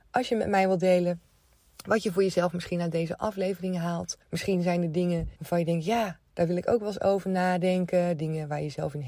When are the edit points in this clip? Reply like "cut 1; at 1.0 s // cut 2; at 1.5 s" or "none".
cut 1; at 4.2 s // cut 2; at 5.4 s